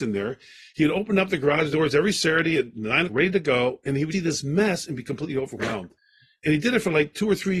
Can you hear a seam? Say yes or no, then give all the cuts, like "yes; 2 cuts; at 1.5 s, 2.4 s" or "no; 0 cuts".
yes; 3 cuts; at 3.1 s, 4.1 s, 6.0 s